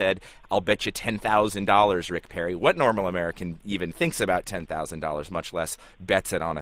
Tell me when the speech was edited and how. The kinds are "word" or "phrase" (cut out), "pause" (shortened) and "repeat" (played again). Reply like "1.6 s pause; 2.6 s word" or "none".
none